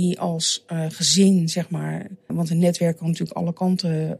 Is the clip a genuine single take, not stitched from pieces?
no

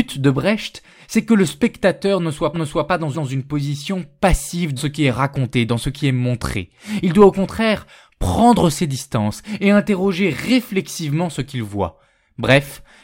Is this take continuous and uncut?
no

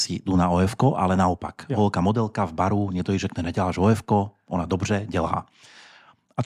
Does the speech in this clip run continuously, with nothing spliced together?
yes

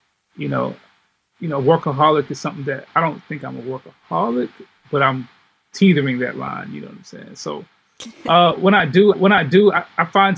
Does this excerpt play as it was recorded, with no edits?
no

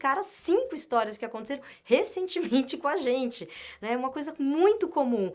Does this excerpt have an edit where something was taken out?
no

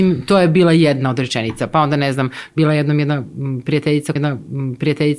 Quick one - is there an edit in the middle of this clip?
yes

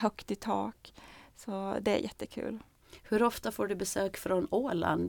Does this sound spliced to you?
no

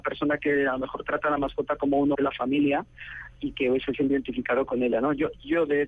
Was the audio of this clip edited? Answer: yes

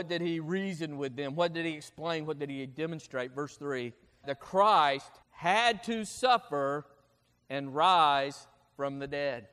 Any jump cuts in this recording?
yes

